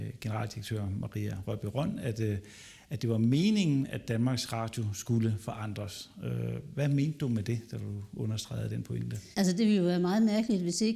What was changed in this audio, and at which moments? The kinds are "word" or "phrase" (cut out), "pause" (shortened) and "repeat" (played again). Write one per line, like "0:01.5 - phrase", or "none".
0:09.3 - pause

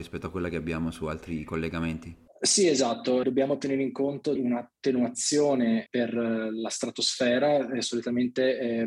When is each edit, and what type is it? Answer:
0:03.2 - word
0:04.4 - word
0:05.9 - word

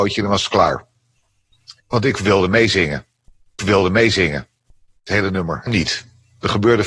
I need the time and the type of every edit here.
0:01.8 - pause
0:03.6 - repeat
0:05.7 - phrase

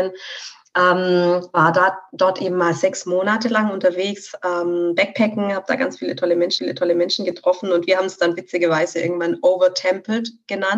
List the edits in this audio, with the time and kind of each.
0:06.6 - repeat

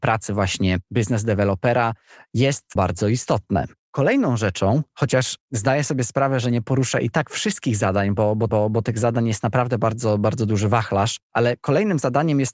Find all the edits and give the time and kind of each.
0:02.8 - word
0:08.5 - repeat

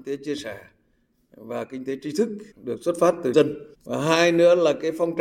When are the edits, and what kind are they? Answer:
0:02.5 - pause
0:03.3 - word
0:03.7 - pause

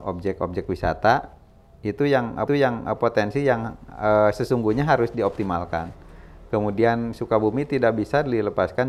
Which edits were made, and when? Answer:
0:02.5 - repeat

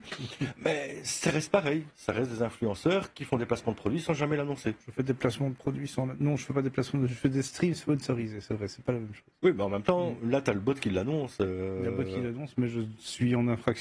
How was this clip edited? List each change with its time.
0:09.4 - pause

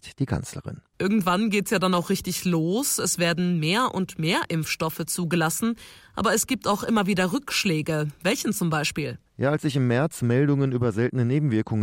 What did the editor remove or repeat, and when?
none

